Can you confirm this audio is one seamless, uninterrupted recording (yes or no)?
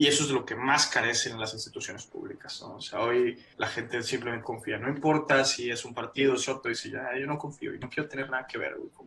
no